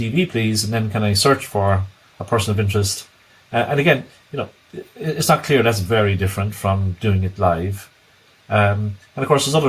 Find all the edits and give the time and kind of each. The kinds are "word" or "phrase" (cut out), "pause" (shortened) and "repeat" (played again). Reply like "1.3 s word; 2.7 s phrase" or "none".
none